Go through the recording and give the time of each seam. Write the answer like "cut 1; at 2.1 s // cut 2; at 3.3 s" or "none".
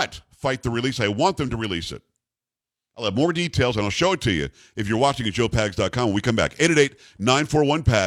none